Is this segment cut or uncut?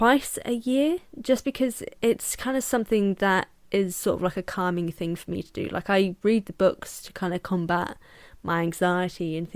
uncut